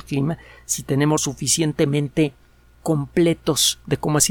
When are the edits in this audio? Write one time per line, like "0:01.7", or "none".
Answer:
0:01.2